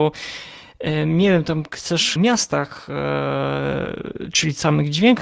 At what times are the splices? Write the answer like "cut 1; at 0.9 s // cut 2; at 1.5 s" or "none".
cut 1; at 2.2 s